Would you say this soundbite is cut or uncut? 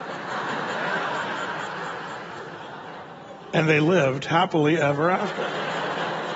uncut